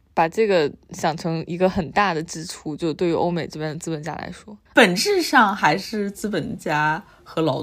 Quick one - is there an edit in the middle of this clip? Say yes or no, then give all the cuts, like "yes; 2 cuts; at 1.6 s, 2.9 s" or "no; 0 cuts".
yes; 1 cut; at 4.7 s